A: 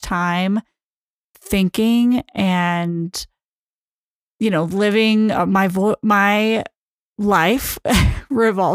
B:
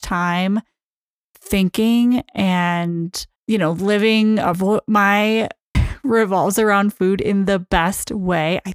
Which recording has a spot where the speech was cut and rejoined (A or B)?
B